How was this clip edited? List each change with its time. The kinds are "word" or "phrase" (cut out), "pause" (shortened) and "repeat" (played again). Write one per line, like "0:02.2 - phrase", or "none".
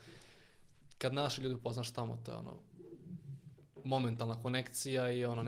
none